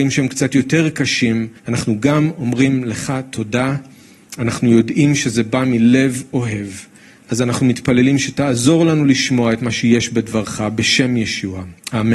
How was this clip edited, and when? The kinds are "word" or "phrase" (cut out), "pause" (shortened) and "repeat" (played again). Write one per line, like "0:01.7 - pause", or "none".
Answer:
0:01.6 - pause